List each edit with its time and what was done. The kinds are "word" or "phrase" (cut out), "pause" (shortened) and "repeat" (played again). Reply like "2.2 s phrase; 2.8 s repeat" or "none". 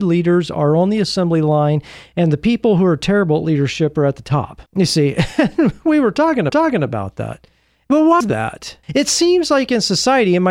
4.7 s pause; 6.5 s repeat; 8.2 s word; 8.8 s pause